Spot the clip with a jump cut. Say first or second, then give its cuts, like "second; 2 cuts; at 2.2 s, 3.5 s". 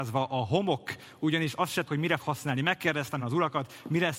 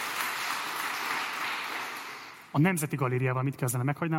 first; 3 cuts; at 1.8 s, 2.2 s, 3.2 s